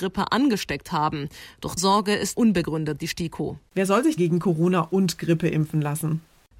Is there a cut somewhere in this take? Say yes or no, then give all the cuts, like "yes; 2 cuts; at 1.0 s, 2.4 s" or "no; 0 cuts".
yes; 5 cuts; at 1.8 s, 2.3 s, 3.0 s, 3.7 s, 4.2 s